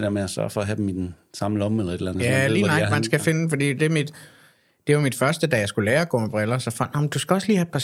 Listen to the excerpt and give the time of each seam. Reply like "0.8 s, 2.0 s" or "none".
none